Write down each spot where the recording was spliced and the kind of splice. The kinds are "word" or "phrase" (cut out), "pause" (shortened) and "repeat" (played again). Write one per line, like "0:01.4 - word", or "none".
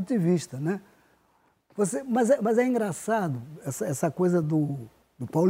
none

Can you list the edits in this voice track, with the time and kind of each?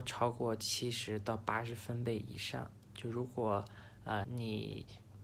0:04.2 - word

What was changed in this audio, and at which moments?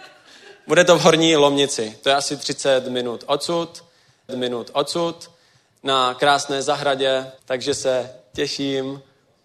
0:04.3 - repeat
0:07.4 - pause

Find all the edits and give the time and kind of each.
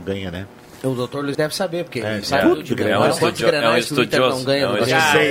0:01.3 - word
0:02.2 - word

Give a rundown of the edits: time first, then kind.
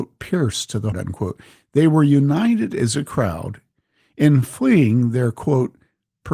0:00.9 - word

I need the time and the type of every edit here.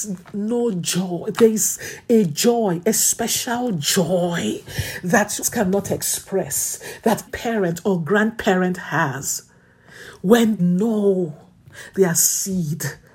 0:05.4 - word
0:07.3 - word
0:10.6 - word
0:11.9 - word

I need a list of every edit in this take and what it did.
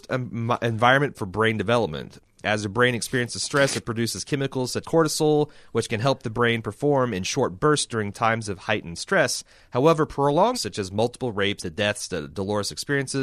0:01.1 - word
0:04.8 - word
0:10.5 - word
0:11.6 - word

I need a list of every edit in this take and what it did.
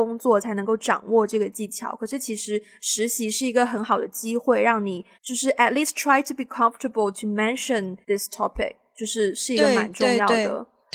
0:05.1 - pause
0:08.0 - pause

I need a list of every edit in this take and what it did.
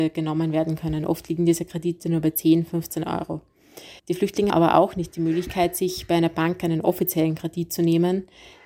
0:04.0 - pause
0:04.5 - word

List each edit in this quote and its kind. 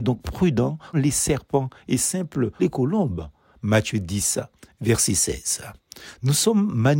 0:00.9 - word
0:02.6 - word

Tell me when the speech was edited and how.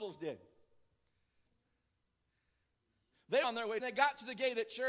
0:03.4 - word
0:03.8 - phrase

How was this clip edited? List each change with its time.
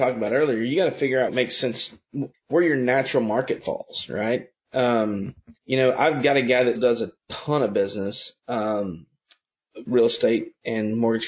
0:01.3 - word
0:02.3 - pause
0:05.6 - pause
0:06.8 - word
0:07.2 - pause
0:09.9 - word

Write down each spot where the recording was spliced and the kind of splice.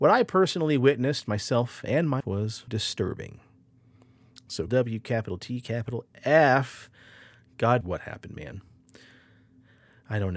0:02.2 - word
0:02.7 - word
0:04.7 - word
0:07.8 - word

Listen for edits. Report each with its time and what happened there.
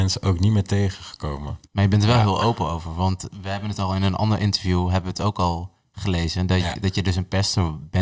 0:01.7 - pause

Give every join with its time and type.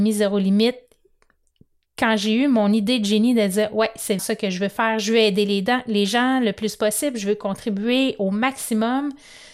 0:04.2 - word

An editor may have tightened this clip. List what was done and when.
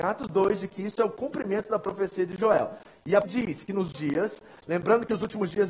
0:03.2 - word
0:03.9 - word

